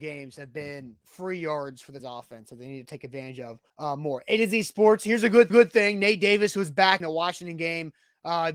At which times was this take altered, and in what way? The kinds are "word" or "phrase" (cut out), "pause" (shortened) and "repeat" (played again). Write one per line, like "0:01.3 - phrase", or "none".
0:02.0 - word
0:03.7 - pause
0:05.5 - repeat
0:07.0 - phrase